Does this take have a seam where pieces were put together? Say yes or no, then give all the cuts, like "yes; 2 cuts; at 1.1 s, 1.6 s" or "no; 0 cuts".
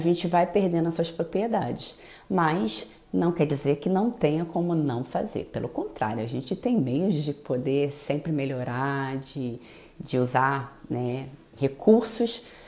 no; 0 cuts